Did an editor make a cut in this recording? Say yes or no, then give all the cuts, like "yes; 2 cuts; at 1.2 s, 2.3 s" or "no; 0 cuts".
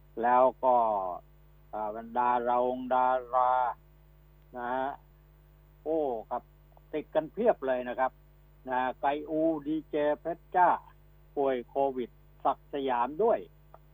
no; 0 cuts